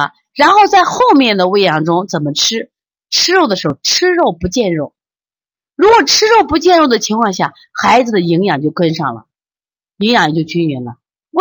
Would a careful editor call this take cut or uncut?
cut